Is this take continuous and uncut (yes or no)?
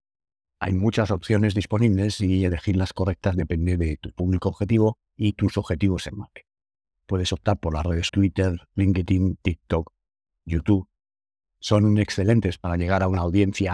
no